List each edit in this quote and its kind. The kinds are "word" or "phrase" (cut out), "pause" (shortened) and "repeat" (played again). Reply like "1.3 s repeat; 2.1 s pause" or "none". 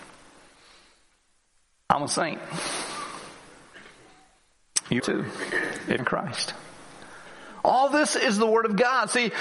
5.0 s word; 6.0 s word